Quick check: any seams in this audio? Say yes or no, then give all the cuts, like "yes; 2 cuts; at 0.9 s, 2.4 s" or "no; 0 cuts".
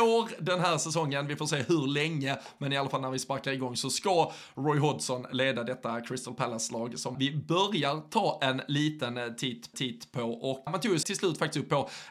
yes; 4 cuts; at 7.1 s, 9.7 s, 10.7 s, 11.0 s